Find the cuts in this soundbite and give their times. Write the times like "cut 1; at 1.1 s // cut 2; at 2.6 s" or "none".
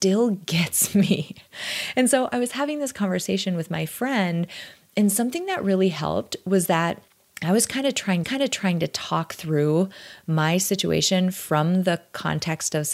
cut 1; at 7.1 s // cut 2; at 8.2 s

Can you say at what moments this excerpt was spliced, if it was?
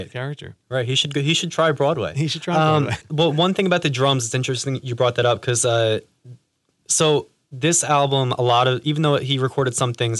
cut 1; at 3.0 s

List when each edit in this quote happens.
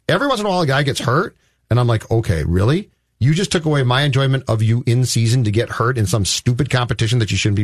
none

